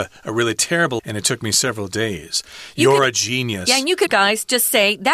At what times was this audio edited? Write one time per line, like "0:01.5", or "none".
0:01.0
0:04.1